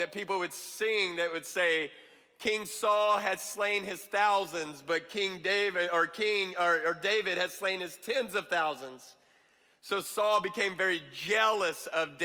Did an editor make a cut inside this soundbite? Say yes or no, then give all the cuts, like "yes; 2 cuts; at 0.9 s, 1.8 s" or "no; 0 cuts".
no; 0 cuts